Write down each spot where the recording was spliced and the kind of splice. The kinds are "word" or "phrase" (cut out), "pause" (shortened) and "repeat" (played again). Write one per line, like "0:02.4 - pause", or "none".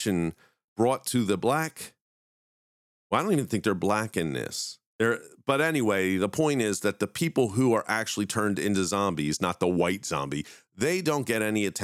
none